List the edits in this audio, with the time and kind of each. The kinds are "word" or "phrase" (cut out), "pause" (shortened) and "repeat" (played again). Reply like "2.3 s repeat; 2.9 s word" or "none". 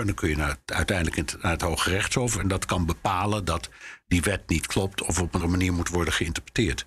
5.4 s word